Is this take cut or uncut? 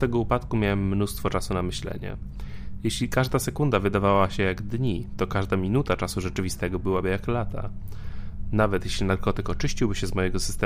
uncut